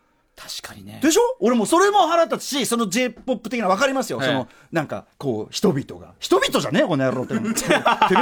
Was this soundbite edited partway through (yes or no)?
yes